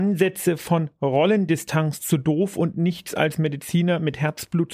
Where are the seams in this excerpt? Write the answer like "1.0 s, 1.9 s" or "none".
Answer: none